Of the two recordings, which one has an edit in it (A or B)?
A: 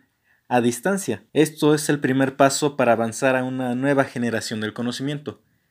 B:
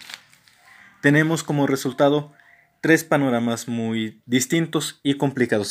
A